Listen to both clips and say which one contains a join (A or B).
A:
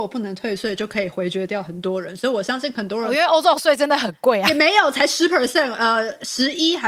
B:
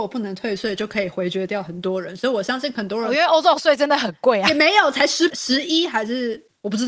B